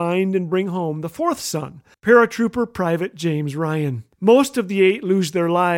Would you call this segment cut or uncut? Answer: cut